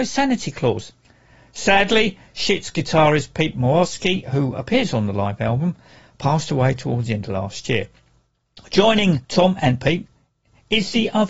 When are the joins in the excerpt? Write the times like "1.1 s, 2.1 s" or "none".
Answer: 9.2 s